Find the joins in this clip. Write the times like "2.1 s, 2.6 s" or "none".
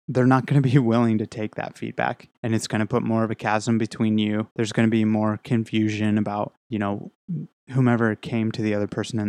2.3 s, 4.5 s, 6.6 s